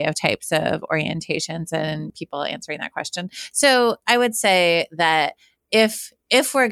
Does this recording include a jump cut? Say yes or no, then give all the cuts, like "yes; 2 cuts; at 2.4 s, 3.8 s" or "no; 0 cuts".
no; 0 cuts